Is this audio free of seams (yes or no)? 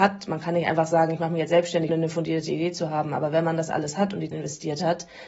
no